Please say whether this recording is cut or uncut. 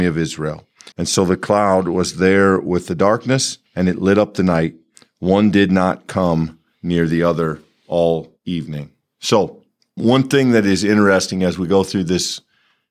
cut